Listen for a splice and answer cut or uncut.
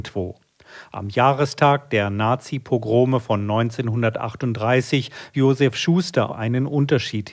cut